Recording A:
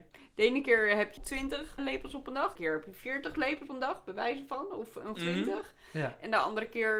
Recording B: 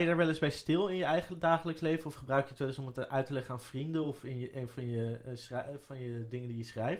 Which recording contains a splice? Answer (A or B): A